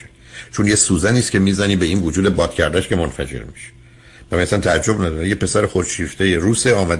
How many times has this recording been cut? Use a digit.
0